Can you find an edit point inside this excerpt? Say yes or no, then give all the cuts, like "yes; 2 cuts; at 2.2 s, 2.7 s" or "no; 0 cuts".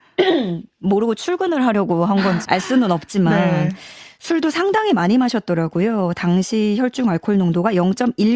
yes; 1 cut; at 2.4 s